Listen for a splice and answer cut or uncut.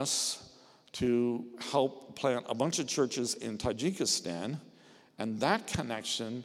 uncut